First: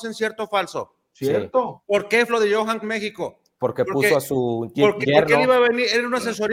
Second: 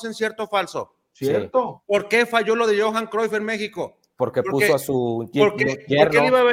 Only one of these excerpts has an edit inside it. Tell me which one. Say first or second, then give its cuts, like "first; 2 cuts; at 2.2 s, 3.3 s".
first; 3 cuts; at 2.3 s, 2.8 s, 5.0 s